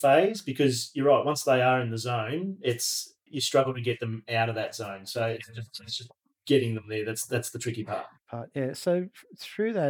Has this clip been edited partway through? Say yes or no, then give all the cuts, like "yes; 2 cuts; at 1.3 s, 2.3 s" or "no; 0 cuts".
yes; 1 cut; at 3.3 s